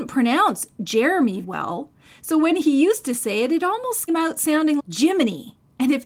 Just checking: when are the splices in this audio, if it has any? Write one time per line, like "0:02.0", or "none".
0:01.4
0:04.1
0:04.8